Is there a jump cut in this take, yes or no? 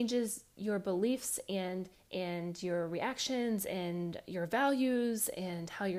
yes